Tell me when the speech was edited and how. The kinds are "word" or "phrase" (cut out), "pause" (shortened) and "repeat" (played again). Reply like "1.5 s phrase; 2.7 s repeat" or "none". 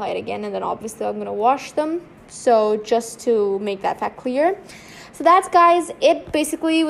none